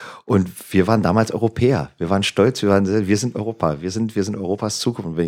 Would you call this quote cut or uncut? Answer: uncut